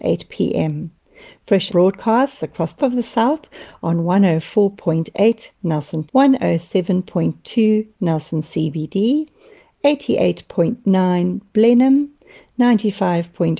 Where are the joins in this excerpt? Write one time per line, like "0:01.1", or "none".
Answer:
0:01.7
0:02.8
0:06.1